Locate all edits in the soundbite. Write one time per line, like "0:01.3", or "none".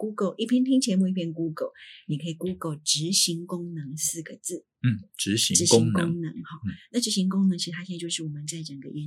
none